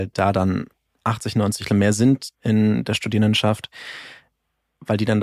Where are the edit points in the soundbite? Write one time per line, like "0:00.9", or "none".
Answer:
0:01.7
0:02.3